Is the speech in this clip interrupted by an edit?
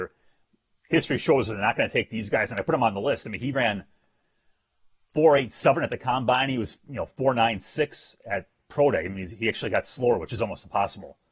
no; 0 cuts

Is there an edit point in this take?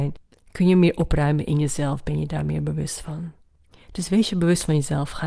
no; 0 cuts

